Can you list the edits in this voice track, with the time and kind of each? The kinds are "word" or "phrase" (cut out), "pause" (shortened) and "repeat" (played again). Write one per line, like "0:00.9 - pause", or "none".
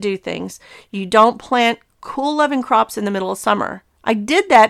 0:01.9 - pause